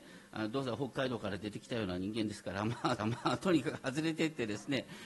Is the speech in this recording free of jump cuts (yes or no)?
no